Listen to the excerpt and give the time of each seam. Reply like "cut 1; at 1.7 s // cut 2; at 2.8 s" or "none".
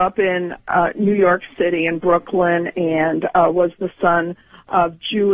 none